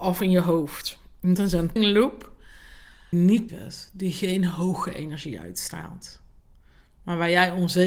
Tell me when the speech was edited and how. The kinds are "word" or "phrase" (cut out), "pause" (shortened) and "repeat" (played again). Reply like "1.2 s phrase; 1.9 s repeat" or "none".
1.4 s word; 1.8 s word; 3.1 s word; 3.5 s word